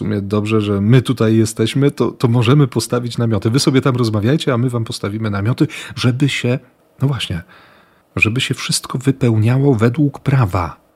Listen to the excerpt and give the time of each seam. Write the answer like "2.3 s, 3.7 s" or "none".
none

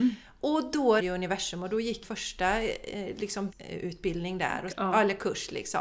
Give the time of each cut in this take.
1.0 s, 2.0 s, 3.5 s, 4.7 s

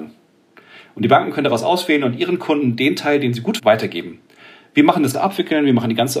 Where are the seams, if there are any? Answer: 3.6 s, 5.1 s

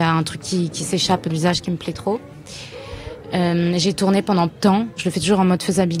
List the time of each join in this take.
1.3 s, 4.5 s

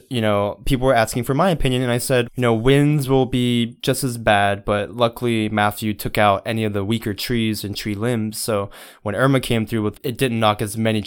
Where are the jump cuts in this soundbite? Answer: 2.3 s, 3.8 s, 10.0 s

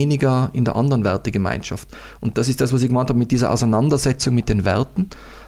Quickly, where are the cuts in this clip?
none

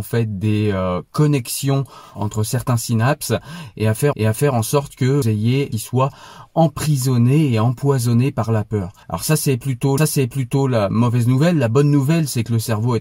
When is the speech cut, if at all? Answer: 2.1 s, 4.1 s, 5.2 s, 5.7 s, 9.0 s, 10.0 s

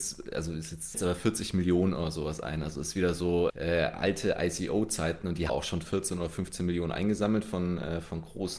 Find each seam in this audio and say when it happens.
0.9 s, 3.5 s, 5.5 s

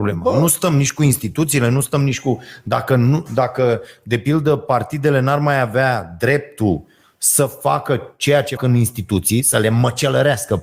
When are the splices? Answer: 8.6 s

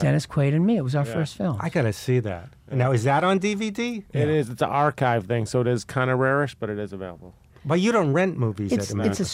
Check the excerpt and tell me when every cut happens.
7.5 s

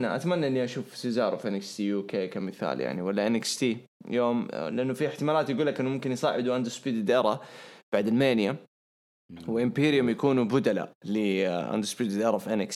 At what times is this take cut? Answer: none

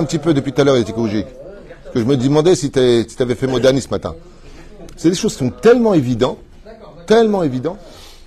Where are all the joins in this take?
none

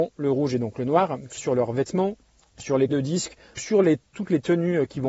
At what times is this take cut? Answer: 1.4 s, 2.9 s, 3.6 s, 4.1 s

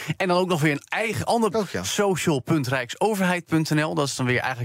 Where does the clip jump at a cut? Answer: 1.5 s

